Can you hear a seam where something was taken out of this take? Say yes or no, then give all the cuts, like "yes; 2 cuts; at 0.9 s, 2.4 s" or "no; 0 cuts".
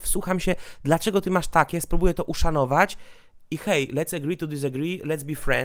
no; 0 cuts